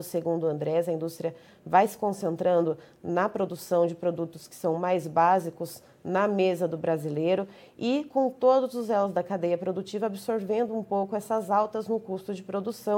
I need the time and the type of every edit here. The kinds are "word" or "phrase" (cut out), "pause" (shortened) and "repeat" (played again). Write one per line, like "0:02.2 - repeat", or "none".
none